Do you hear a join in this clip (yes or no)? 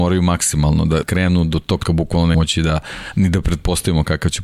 yes